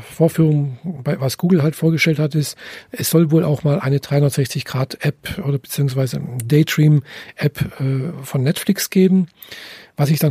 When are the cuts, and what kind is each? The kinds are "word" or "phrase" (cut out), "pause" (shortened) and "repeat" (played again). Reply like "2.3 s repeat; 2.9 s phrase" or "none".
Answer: none